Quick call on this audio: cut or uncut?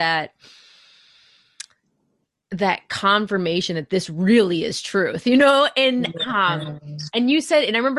uncut